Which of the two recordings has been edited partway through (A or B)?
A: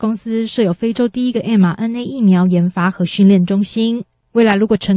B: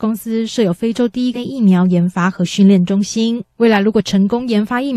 B